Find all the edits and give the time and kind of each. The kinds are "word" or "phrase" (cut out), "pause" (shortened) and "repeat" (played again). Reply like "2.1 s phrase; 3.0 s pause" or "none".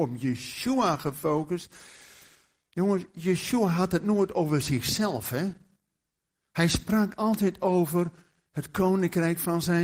none